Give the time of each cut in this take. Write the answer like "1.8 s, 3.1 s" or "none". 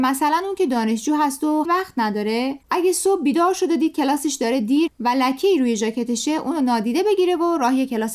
1.6 s, 2.6 s, 4.9 s